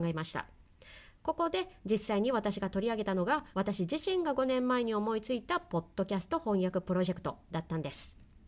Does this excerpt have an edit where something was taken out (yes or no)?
yes